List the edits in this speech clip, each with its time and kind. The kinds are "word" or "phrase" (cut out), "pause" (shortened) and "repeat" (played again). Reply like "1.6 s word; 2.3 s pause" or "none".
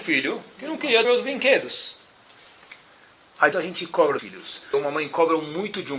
1.0 s word; 3.5 s phrase; 4.2 s word; 4.7 s phrase